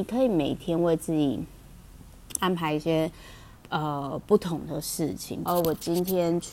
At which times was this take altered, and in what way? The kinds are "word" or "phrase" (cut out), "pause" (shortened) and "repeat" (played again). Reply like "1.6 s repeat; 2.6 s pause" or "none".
3.6 s pause; 5.5 s phrase